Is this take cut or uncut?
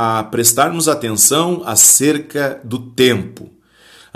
uncut